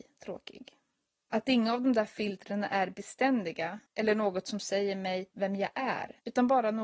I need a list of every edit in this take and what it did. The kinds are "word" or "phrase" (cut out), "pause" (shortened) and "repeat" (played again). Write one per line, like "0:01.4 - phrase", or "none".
0:03.9 - pause